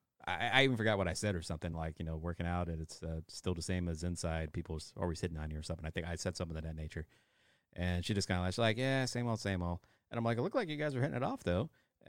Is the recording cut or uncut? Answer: uncut